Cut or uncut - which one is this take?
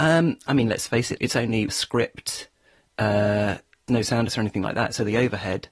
cut